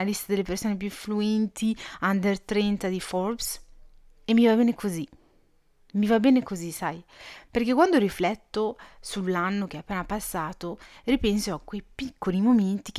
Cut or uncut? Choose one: uncut